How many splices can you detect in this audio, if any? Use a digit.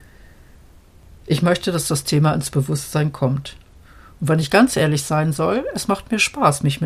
0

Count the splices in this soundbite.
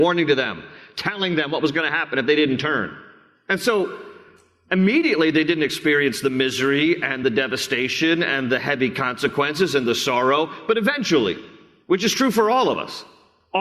0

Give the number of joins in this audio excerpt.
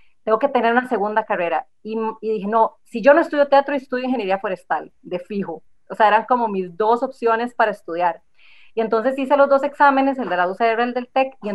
0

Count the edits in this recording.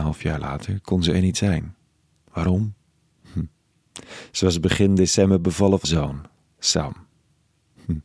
1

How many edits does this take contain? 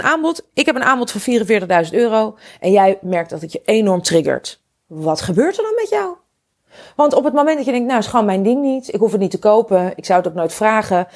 0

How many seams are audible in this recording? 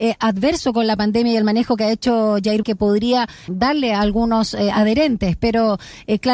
2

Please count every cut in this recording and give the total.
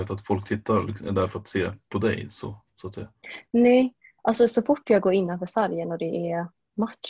0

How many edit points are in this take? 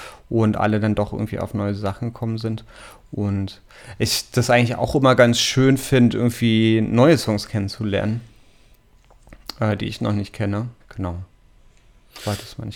1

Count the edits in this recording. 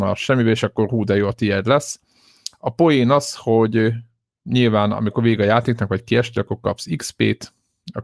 0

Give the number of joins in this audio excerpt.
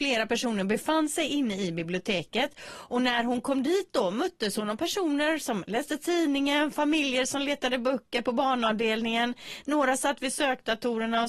0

